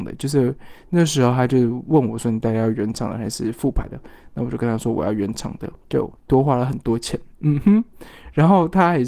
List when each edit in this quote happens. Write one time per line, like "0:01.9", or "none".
0:05.8